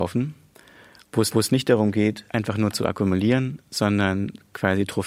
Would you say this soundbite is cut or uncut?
cut